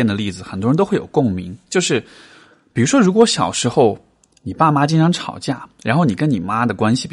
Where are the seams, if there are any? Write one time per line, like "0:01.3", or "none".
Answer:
none